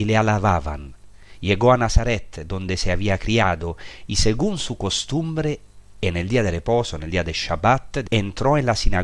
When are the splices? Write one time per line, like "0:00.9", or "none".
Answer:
0:08.1